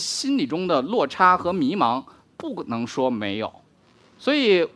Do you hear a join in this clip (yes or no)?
no